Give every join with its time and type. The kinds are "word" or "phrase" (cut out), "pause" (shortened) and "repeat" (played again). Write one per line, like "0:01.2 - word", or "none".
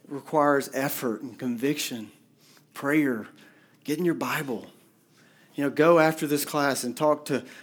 none

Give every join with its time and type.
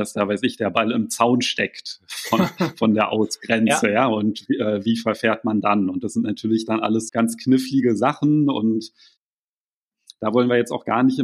0:07.1 - word

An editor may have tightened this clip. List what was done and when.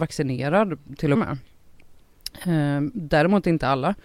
0:01.2 - phrase

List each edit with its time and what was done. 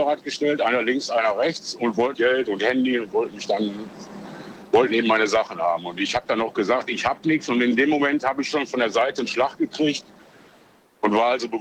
0:02.1 - word

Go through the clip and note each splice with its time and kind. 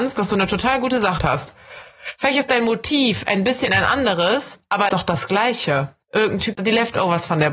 0:01.2 - word
0:04.9 - phrase
0:06.0 - pause
0:06.5 - word

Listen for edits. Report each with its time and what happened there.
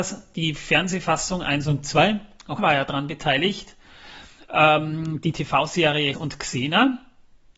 0:02.6 - word
0:06.1 - word

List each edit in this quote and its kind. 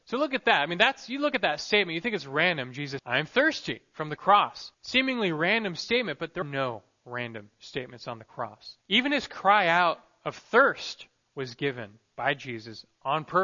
0:03.0 - word
0:04.7 - pause
0:06.4 - word
0:08.8 - pause

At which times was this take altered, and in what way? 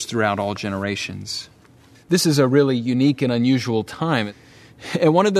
0:01.9 - pause

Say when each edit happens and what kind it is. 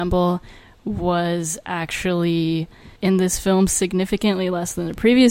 0:03.0 - pause

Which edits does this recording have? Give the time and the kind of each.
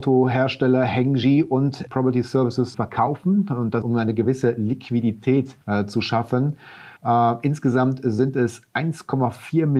0:01.9 - word
0:02.7 - word
0:03.8 - phrase
0:05.6 - pause
0:07.0 - pause

